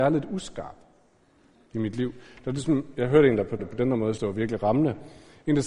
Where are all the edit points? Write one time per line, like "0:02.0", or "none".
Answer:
0:03.6
0:04.2